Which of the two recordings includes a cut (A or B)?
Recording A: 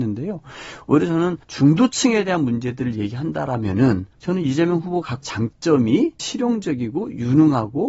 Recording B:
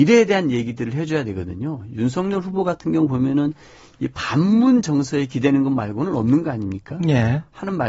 A